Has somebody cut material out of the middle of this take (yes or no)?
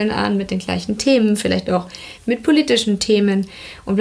no